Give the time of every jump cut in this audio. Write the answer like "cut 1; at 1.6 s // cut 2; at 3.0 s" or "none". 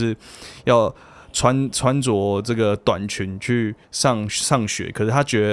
cut 1; at 3.8 s